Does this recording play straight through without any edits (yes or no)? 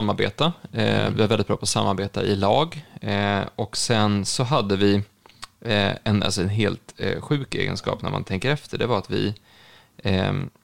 yes